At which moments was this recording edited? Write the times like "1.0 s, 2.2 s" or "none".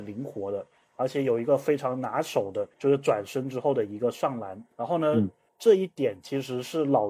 2.7 s, 4.7 s, 5.5 s